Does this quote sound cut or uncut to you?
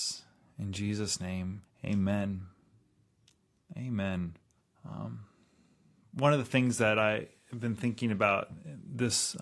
cut